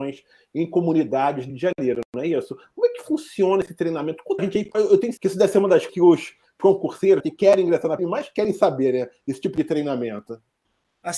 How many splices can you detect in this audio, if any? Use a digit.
8